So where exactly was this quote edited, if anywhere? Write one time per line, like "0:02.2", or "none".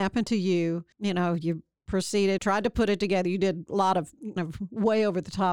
0:00.9
0:02.4
0:04.4

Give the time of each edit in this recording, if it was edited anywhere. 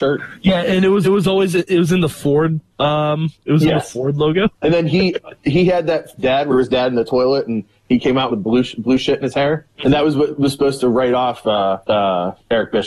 0:01.0
0:02.7
0:04.5
0:06.2
0:06.5
0:08.3
0:09.7
0:11.8

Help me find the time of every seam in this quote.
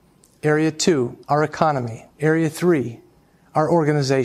0:01.2
0:02.1

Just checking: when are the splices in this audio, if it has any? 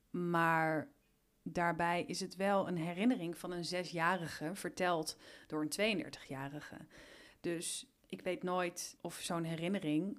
none

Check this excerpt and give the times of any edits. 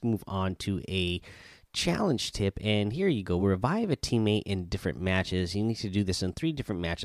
none

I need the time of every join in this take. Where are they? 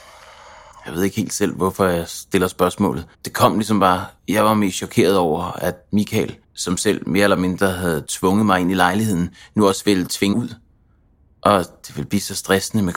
0:03.1
0:04.2
0:06.4
0:10.3

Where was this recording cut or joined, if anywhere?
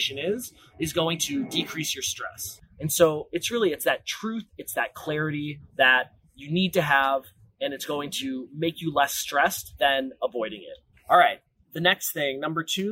none

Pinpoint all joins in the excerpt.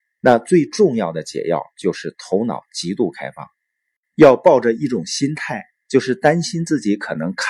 none

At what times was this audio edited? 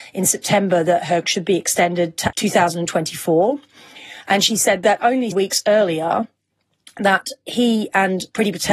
0:01.2
0:02.3
0:05.3

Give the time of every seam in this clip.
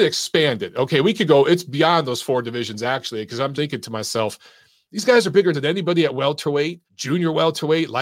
0:03.5
0:05.5
0:06.9

